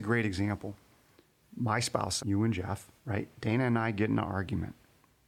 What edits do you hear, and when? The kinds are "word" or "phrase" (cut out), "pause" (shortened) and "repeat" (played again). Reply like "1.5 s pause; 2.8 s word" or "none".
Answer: 2.2 s phrase; 3.0 s pause